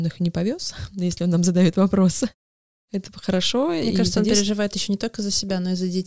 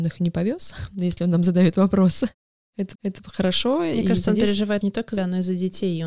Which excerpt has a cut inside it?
second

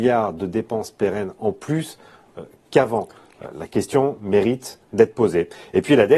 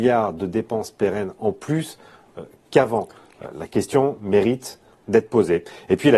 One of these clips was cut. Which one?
first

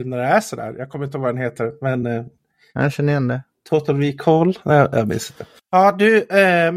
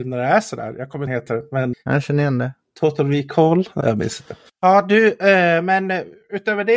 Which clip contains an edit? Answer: second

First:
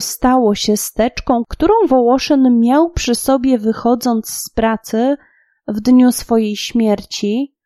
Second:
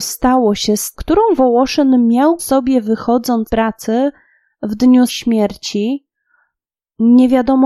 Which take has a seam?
second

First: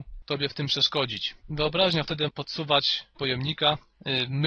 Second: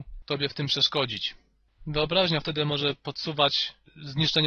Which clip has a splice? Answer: first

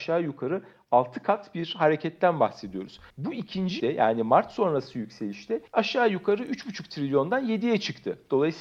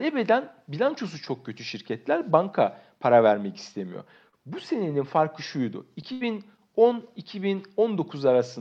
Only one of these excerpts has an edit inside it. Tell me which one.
first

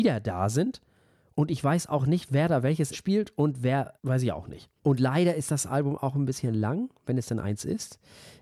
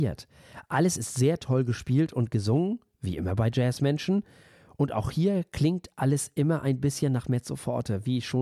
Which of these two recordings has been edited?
first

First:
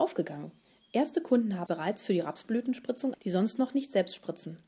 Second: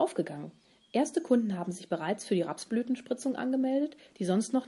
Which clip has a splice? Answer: first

